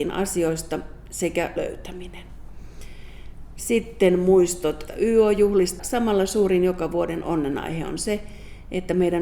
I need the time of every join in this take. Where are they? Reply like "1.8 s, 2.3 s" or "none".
1.6 s, 4.9 s, 5.8 s

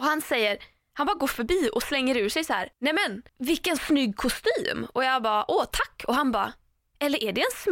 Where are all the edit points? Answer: 2.7 s, 3.3 s

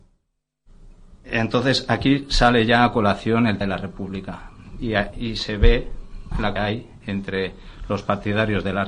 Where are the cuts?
3.6 s, 6.6 s

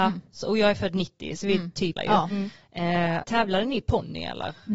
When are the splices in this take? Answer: 2.0 s, 3.2 s

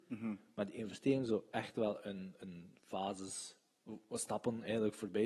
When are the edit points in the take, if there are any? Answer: none

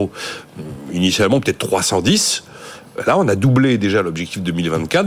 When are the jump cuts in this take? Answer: none

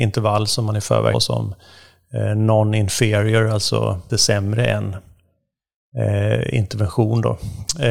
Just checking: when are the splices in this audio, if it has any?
1.1 s, 4.1 s

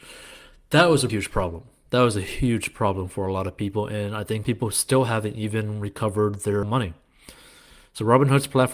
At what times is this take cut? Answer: 1.1 s, 4.4 s, 6.6 s

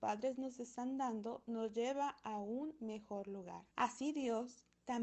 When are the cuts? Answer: 3.7 s

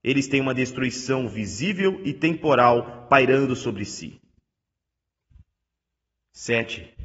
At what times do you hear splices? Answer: none

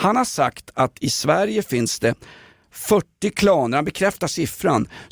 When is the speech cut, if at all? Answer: none

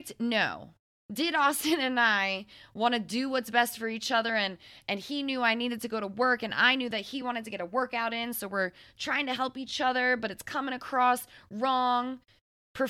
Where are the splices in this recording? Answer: none

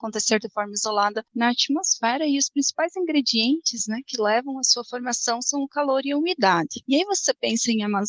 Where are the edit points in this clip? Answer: none

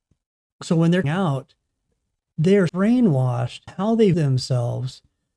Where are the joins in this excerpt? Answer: 1.0 s, 2.7 s, 3.7 s, 4.1 s

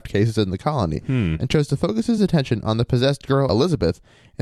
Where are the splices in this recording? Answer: none

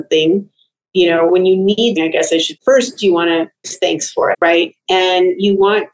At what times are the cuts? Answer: 1.3 s, 2.0 s, 2.6 s, 3.6 s, 4.3 s

